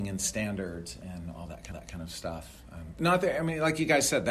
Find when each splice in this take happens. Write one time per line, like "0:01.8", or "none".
0:01.7